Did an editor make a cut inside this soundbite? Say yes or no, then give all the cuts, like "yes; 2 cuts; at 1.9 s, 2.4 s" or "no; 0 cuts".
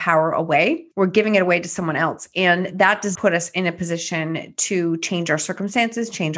yes; 2 cuts; at 0.9 s, 3.1 s